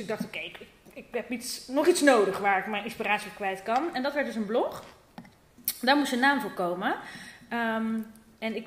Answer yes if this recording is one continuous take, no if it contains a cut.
yes